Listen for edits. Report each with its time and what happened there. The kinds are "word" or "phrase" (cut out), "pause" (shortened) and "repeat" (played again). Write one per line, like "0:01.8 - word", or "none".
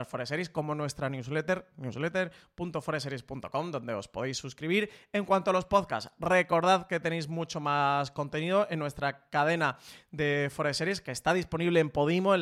none